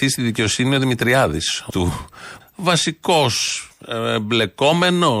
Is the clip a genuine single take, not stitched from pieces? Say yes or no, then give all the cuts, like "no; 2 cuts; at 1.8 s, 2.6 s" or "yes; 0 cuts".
no; 2 cuts; at 1.7 s, 2.4 s